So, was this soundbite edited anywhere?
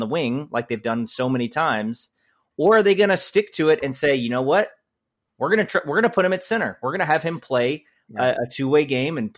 no; 0 cuts

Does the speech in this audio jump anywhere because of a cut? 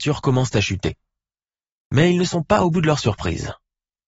no; 0 cuts

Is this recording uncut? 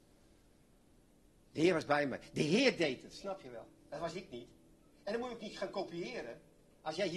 yes; 0 cuts

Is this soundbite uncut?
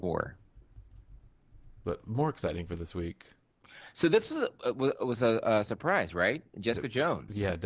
yes; 0 cuts

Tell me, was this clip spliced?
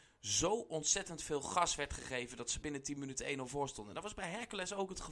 yes; 1 cut; at 2.6 s

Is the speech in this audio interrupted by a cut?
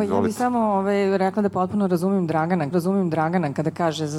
yes; 1 cut; at 2.7 s

